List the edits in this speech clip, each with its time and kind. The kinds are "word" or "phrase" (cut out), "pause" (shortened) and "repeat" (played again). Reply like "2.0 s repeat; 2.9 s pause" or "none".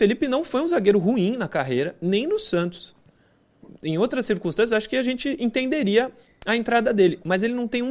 none